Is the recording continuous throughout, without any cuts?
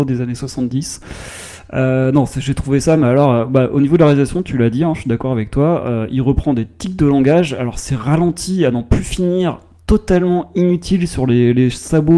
yes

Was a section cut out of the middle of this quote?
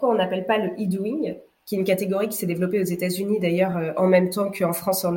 no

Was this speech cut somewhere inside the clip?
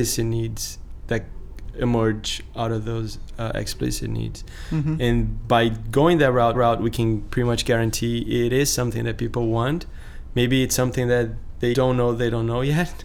yes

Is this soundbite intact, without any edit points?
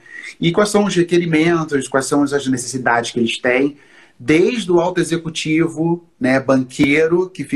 yes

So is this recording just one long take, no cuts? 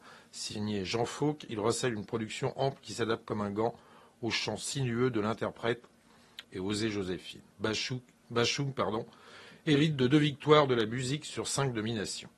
no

